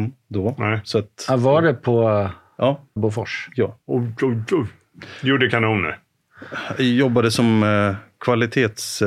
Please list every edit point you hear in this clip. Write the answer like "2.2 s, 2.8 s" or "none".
3.0 s, 3.8 s

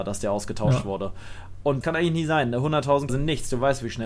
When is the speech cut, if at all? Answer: 1.8 s, 3.1 s

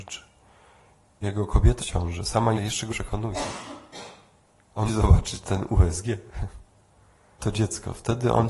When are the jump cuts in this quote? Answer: 1.2 s, 1.8 s, 2.6 s, 2.9 s, 4.9 s, 7.4 s

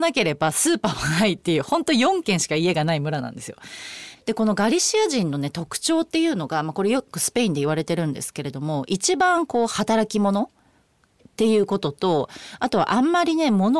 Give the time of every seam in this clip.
none

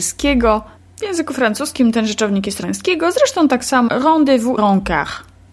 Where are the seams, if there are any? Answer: 2.6 s, 3.9 s, 4.6 s

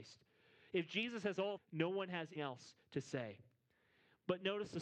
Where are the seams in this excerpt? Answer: 1.6 s, 2.4 s

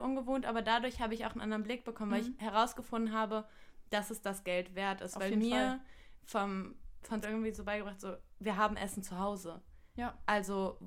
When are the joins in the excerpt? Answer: 7.2 s

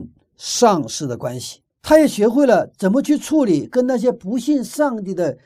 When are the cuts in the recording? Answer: 1.7 s

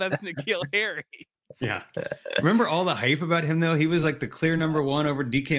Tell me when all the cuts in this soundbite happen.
none

